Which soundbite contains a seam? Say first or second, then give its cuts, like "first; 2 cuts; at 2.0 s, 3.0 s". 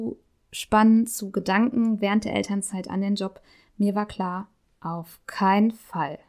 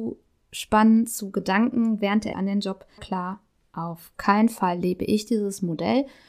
second; 3 cuts; at 2.3 s, 3.0 s, 4.1 s